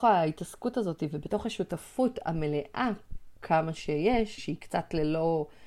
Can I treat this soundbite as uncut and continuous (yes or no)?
no